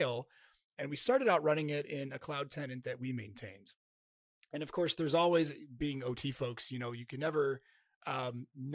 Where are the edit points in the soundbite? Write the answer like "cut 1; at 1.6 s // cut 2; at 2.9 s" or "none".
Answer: none

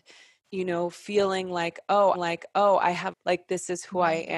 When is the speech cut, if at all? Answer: cut 1; at 2.1 s // cut 2; at 3.1 s

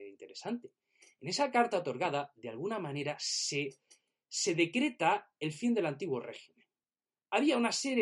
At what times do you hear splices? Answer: none

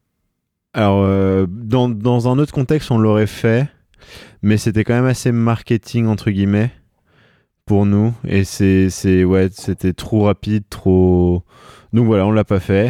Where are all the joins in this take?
none

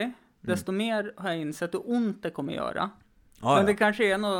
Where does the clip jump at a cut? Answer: none

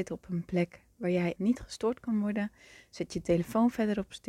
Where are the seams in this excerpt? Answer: cut 1; at 1.4 s

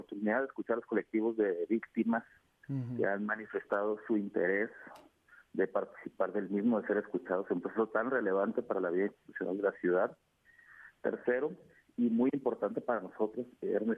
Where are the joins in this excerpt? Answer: none

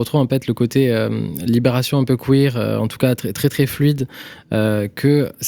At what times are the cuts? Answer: none

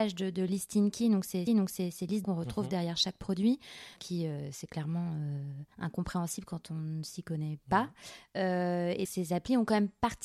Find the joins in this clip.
cut 1; at 1.5 s // cut 2; at 2.2 s // cut 3; at 4.0 s // cut 4; at 5.7 s // cut 5; at 9.1 s

